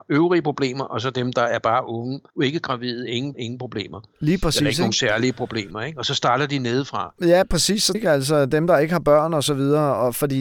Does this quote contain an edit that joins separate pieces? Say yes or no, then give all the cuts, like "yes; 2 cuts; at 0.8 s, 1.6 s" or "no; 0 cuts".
yes; 3 cuts; at 2.3 s, 3.3 s, 7.9 s